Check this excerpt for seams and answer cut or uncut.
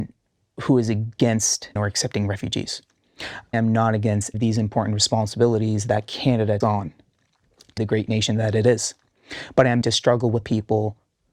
cut